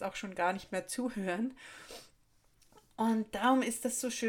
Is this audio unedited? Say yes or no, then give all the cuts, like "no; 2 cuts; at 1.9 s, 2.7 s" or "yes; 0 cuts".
yes; 0 cuts